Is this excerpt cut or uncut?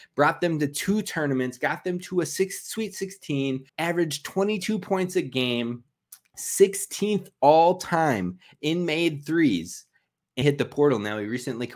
cut